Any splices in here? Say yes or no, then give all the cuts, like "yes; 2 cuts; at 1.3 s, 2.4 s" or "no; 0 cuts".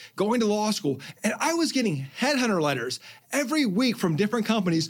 no; 0 cuts